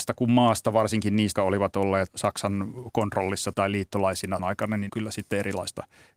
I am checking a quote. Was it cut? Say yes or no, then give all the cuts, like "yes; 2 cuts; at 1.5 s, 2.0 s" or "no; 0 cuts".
yes; 5 cuts; at 1.4 s, 2.1 s, 3.5 s, 4.4 s, 4.9 s